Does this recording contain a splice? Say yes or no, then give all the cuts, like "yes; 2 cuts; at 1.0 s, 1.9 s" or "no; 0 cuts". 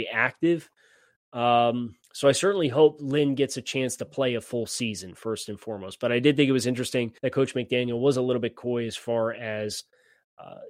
yes; 2 cuts; at 2.0 s, 7.2 s